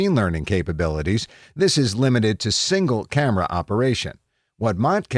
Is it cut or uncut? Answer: uncut